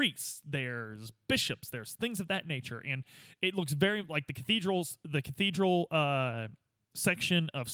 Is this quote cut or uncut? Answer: uncut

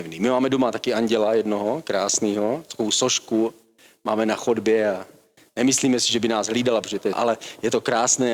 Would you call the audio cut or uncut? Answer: cut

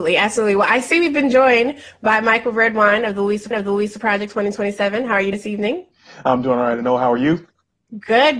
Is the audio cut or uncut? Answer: cut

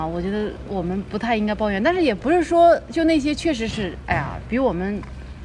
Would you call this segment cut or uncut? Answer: uncut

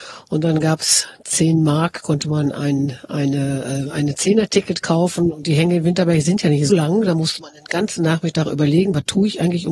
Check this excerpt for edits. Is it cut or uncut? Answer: cut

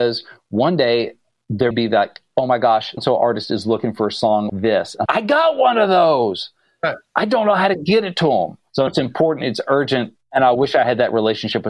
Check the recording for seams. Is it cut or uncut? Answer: cut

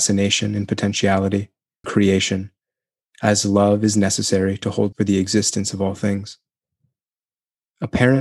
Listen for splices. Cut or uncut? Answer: cut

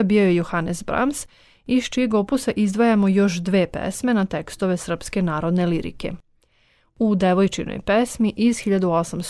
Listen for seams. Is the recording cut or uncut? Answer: uncut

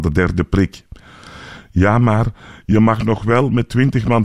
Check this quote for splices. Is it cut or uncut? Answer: uncut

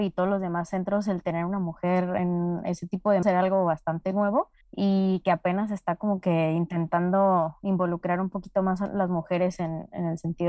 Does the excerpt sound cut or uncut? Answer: cut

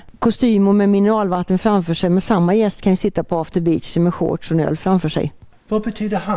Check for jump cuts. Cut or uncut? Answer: uncut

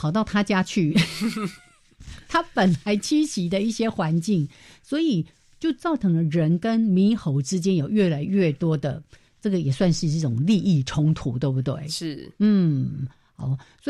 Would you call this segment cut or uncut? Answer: uncut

